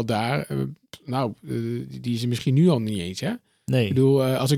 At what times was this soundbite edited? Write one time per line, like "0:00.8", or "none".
none